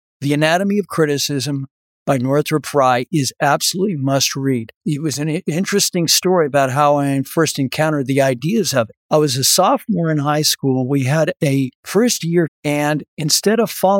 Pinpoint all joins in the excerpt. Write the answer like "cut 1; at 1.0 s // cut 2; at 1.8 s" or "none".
cut 1; at 11.7 s // cut 2; at 12.5 s